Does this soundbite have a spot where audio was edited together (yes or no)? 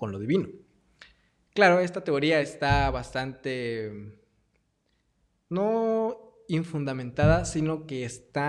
no